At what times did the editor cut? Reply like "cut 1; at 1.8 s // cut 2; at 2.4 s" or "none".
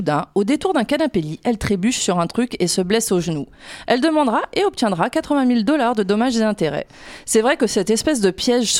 none